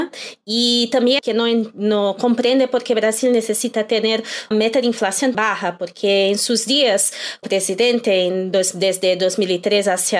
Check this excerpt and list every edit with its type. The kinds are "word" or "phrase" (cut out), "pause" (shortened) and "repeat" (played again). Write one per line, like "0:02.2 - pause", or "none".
0:01.2 - phrase
0:04.5 - word
0:05.3 - word
0:07.4 - word